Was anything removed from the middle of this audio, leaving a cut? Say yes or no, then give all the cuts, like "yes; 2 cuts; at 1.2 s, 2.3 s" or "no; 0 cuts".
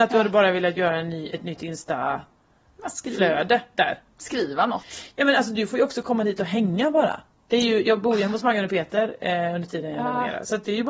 no; 0 cuts